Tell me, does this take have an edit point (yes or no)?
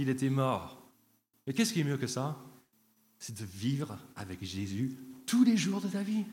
no